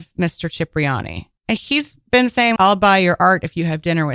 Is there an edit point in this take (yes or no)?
yes